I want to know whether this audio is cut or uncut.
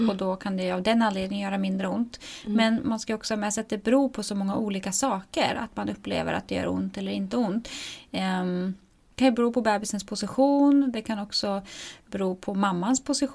cut